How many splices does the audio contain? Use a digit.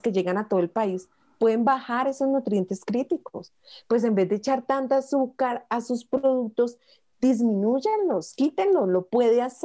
0